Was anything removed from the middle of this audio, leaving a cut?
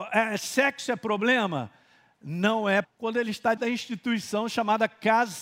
yes; 2 cuts; at 2.8 s, 3.6 s

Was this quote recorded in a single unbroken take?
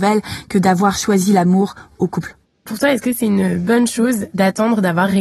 no; 1 cut; at 2.7 s

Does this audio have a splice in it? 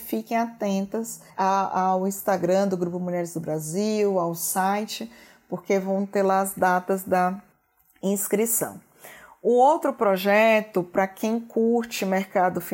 yes; 1 cut; at 1.3 s

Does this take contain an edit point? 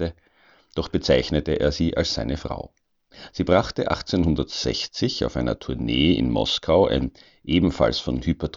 no; 0 cuts

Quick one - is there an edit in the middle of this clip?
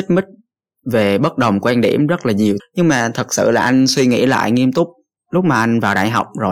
yes; 1 cut; at 2.6 s

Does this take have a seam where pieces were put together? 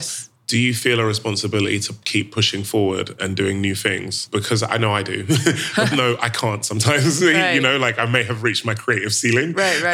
yes; 1 cut; at 5.9 s

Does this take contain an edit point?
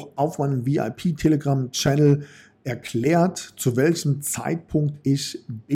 no; 0 cuts

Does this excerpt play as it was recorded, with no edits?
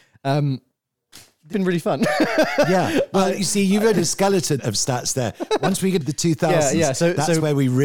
no; 4 cuts; at 1.5 s, 3.9 s, 4.6 s, 6.0 s

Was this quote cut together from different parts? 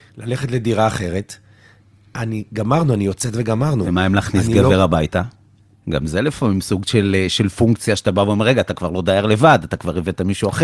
no; 0 cuts

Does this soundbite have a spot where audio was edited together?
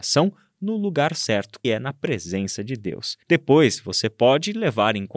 yes; 2 cuts; at 1.6 s, 3.2 s

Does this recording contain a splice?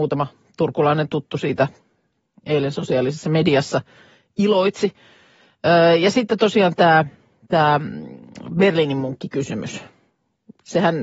no; 0 cuts

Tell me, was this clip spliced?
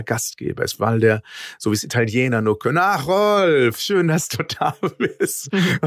no; 0 cuts

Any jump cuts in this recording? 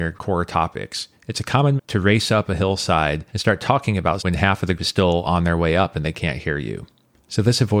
yes; 4 cuts; at 1.8 s, 3.3 s, 4.2 s, 4.8 s

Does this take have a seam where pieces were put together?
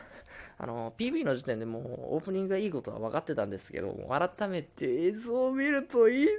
no; 0 cuts

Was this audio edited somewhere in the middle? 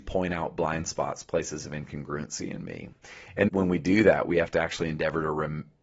yes; 1 cut; at 3.5 s

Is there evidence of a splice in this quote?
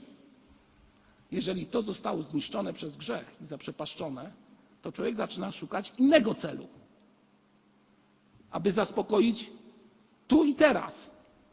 no; 0 cuts

